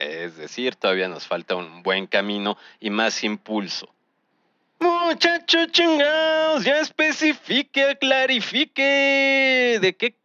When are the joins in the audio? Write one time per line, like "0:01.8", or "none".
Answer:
none